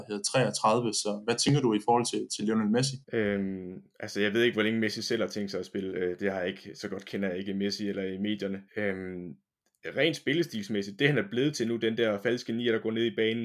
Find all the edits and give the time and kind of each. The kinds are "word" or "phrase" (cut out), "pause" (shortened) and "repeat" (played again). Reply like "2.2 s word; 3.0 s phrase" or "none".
3.0 s pause; 8.7 s pause